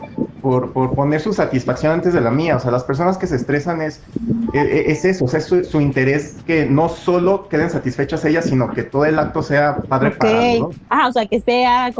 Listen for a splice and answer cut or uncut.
uncut